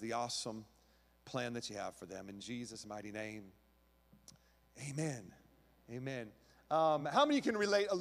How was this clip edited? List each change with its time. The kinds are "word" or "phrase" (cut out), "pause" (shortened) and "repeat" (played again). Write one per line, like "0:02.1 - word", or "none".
none